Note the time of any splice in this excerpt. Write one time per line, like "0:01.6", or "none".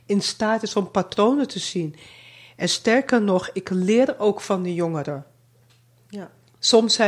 none